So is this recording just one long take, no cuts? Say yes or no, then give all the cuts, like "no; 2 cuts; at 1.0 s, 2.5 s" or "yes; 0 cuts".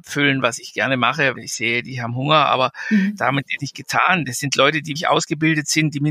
no; 3 cuts; at 1.4 s, 3.6 s, 5.0 s